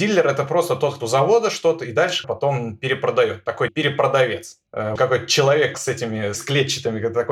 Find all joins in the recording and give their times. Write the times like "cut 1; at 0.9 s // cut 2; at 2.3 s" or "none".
cut 1; at 1.0 s // cut 2; at 2.2 s // cut 3; at 3.7 s // cut 4; at 5.0 s // cut 5; at 5.7 s // cut 6; at 6.3 s